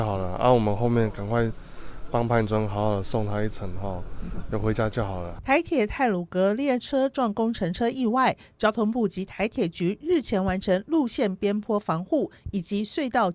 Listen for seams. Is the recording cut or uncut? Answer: uncut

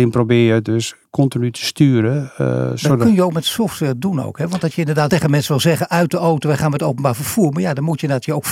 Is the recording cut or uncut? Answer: cut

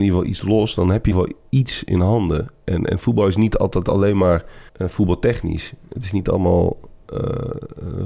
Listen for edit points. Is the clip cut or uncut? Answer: cut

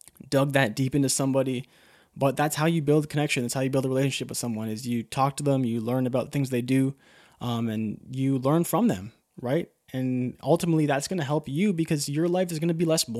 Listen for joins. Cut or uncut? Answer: uncut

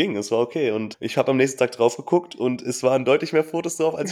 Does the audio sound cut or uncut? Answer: cut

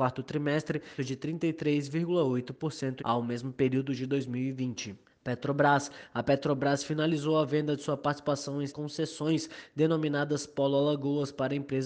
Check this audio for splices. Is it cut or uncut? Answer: cut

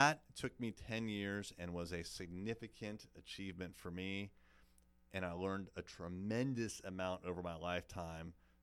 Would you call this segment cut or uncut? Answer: uncut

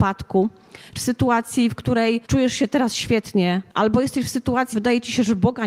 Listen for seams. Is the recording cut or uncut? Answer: cut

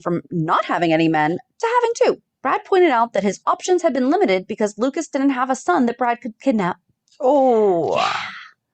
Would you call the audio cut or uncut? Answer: uncut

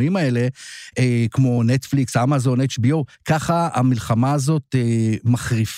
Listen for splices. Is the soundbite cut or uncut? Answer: uncut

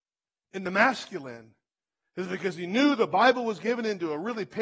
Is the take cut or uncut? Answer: uncut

